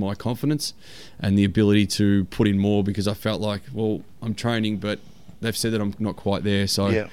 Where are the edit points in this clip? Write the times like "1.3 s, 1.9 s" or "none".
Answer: none